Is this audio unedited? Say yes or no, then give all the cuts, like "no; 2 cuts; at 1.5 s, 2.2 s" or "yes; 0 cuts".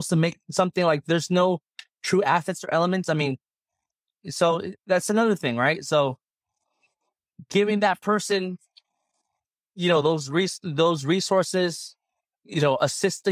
yes; 0 cuts